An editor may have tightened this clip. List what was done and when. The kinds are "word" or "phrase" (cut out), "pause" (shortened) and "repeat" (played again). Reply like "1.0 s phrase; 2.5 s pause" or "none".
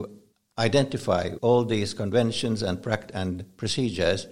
1.4 s word